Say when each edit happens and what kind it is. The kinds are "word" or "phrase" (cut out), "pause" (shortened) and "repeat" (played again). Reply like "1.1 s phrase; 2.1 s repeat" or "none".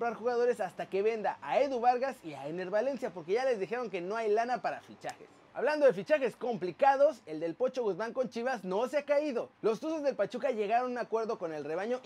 9.5 s pause